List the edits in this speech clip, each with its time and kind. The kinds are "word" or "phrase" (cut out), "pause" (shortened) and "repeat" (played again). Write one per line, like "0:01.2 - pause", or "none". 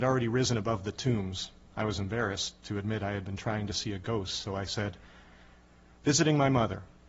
none